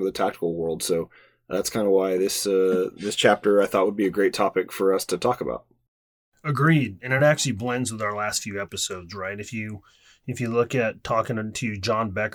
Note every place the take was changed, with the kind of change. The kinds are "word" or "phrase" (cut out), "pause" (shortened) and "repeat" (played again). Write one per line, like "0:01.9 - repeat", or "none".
none